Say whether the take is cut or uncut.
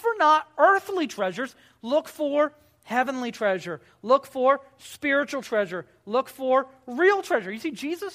uncut